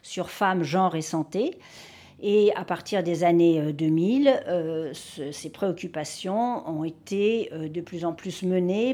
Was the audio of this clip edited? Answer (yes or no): no